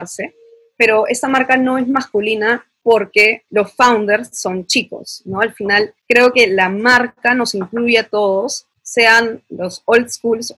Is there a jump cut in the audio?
yes; 2 cuts; at 3.5 s, 6.0 s

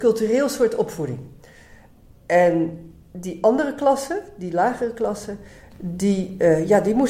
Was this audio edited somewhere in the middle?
no; 0 cuts

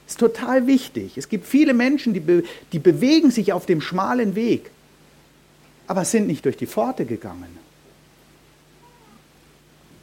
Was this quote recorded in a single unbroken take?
yes; 0 cuts

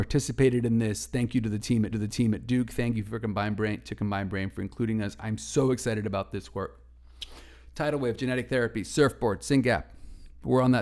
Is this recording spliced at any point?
yes; 1 cut; at 1.9 s

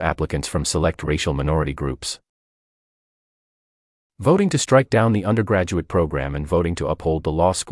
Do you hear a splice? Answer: no; 0 cuts

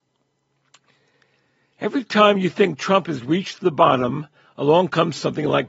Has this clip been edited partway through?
no; 0 cuts

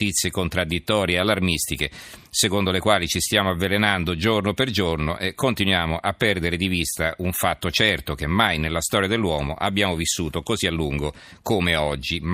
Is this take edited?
no; 0 cuts

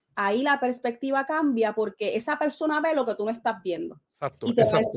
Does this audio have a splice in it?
yes; 1 cut; at 4.0 s

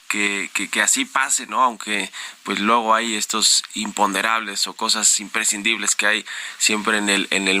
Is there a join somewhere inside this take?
no; 0 cuts

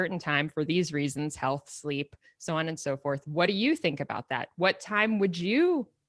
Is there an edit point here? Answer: no; 0 cuts

